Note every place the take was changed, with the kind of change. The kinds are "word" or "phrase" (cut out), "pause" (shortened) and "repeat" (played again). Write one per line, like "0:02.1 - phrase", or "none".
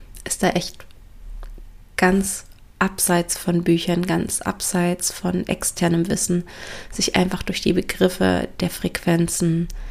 none